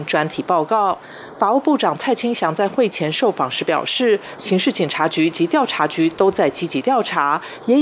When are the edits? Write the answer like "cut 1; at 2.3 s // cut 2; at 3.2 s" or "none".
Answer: cut 1; at 4.4 s